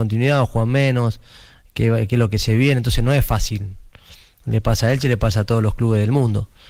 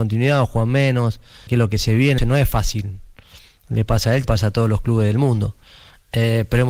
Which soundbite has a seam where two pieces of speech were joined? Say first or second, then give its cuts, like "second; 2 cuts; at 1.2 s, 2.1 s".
second; 3 cuts; at 1.5 s, 2.2 s, 4.2 s